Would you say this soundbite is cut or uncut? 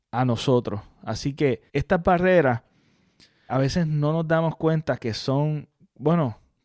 cut